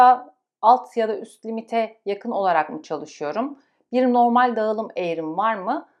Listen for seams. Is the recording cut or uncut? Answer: uncut